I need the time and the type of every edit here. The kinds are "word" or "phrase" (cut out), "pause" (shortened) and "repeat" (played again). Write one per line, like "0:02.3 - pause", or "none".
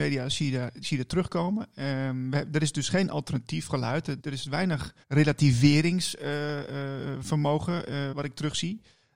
0:04.2 - word
0:05.0 - pause
0:08.1 - word